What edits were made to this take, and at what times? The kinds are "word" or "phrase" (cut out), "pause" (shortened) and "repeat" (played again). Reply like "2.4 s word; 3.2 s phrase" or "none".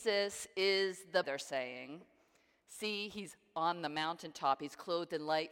1.2 s word